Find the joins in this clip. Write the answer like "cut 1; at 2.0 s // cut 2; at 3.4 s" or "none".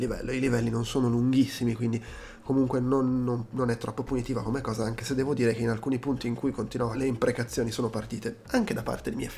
cut 1; at 6.9 s